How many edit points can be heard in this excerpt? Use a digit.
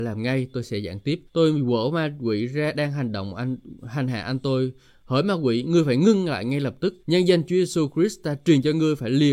2